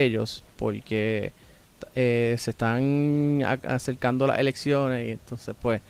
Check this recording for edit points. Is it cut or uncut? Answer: uncut